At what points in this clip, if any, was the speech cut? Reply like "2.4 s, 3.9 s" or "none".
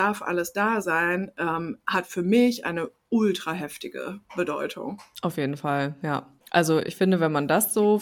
6.4 s